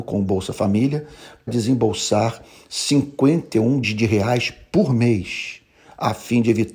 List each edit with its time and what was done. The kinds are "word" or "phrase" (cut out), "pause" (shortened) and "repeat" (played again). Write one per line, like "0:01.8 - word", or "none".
0:01.5 - word
0:03.8 - word